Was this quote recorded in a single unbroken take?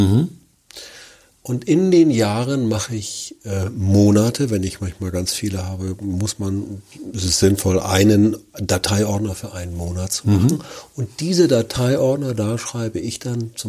yes; 0 cuts

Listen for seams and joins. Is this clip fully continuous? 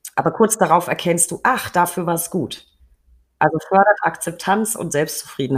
yes; 0 cuts

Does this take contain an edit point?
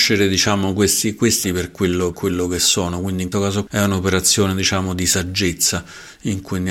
yes; 4 cuts; at 1.4 s, 2.1 s, 3.3 s, 3.7 s

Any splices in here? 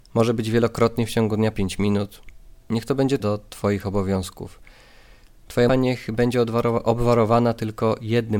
yes; 3 cuts; at 1.5 s, 3.2 s, 5.7 s

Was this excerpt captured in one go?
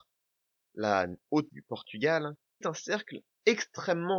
no; 2 cuts; at 1.5 s, 2.6 s

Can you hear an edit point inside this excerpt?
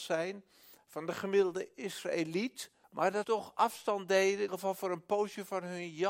yes; 3 cuts; at 2.8 s, 3.2 s, 4.5 s

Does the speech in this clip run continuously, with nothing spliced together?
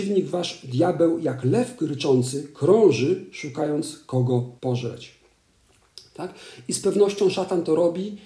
no; 1 cut; at 4.6 s

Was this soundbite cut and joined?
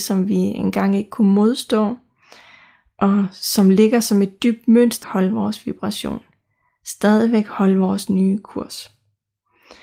yes; 1 cut; at 5.0 s

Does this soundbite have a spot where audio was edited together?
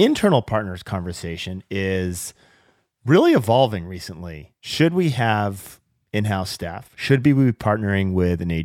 no; 0 cuts

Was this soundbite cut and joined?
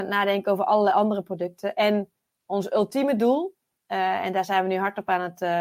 no; 0 cuts

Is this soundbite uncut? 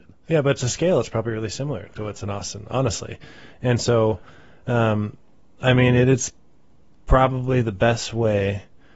yes; 0 cuts

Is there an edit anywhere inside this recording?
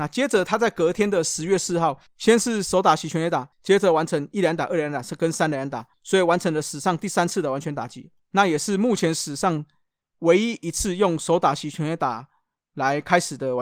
yes; 4 cuts; at 2.1 s, 3.5 s, 5.9 s, 8.2 s

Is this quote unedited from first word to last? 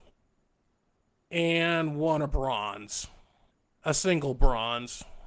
yes; 0 cuts

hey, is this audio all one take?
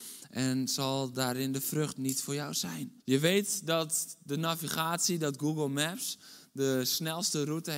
no; 1 cut; at 3.0 s

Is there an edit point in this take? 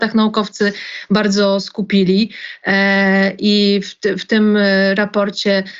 no; 0 cuts

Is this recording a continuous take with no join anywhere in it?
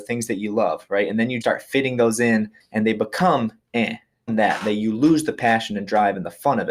no; 3 cuts; at 1.4 s, 2.6 s, 4.3 s

